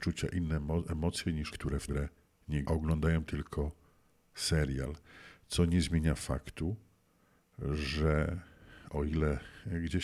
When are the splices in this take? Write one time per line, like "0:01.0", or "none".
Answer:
0:01.5
0:01.9
0:02.6